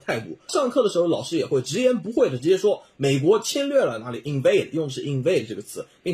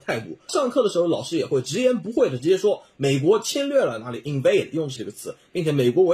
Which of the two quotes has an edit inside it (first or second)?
second